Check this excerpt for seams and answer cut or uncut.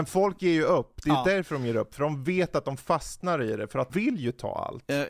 cut